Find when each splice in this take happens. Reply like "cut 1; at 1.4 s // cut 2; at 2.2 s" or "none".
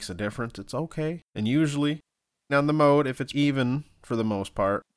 cut 1; at 1.3 s // cut 2; at 2.5 s // cut 3; at 3.3 s